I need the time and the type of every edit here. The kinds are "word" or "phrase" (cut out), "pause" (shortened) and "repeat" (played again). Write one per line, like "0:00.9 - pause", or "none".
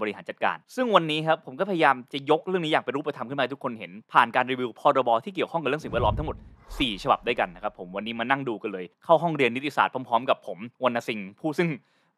0:08.9 - pause
0:10.7 - pause